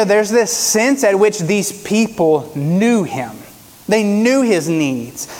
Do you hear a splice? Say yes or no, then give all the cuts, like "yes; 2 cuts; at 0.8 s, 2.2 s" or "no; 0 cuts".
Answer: no; 0 cuts